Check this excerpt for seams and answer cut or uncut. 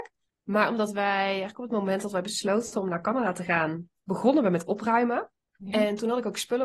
uncut